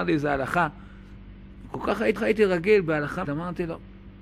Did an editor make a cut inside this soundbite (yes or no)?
yes